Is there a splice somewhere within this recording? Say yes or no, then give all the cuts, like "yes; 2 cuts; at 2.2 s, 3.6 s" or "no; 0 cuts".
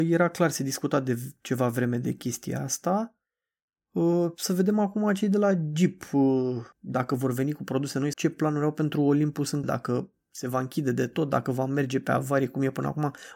yes; 3 cuts; at 6.7 s, 8.1 s, 9.6 s